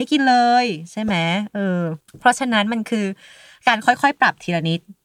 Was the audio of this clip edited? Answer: yes; 1 cut; at 2.0 s

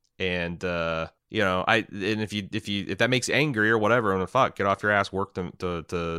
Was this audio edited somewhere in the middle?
yes; 1 cut; at 1.2 s

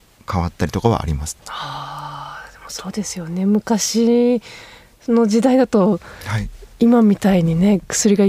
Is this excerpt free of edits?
no; 1 cut; at 1.4 s

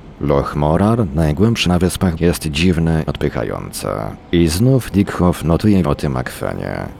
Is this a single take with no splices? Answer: no; 5 cuts; at 1.7 s, 2.2 s, 3.1 s, 4.9 s, 5.8 s

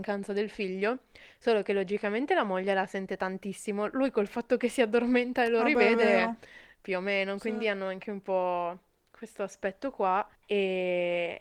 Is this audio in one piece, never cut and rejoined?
yes; 0 cuts

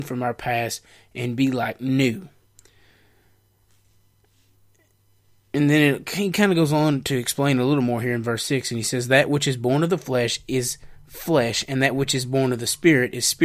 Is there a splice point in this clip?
no; 0 cuts

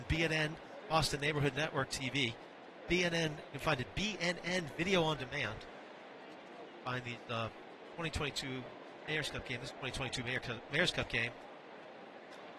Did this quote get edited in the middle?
no; 0 cuts

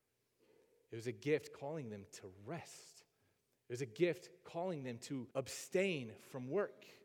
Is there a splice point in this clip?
yes; 2 cuts; at 3.4 s, 5.3 s

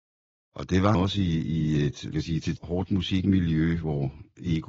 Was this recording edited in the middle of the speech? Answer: yes; 3 cuts; at 0.9 s, 2.1 s, 2.6 s

